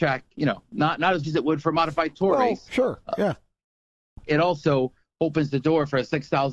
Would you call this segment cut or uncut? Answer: cut